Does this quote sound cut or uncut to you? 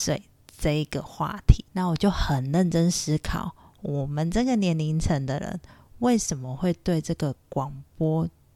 cut